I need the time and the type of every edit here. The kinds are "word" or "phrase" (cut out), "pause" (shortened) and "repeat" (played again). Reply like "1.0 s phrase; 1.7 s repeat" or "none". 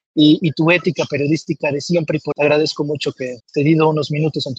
2.3 s word; 3.4 s phrase